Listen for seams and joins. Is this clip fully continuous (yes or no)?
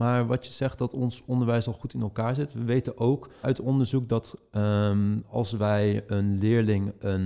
no